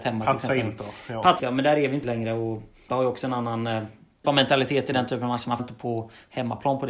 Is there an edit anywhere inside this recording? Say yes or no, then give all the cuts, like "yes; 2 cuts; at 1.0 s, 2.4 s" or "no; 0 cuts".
yes; 5 cuts; at 1.4 s, 2.0 s, 2.9 s, 4.2 s, 5.6 s